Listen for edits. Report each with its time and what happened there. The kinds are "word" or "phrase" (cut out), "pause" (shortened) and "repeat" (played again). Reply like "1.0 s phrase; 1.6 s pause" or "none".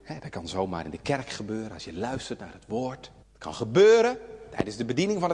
3.2 s pause